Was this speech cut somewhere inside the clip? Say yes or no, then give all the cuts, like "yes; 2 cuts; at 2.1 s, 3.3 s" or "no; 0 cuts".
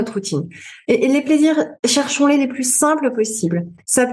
no; 0 cuts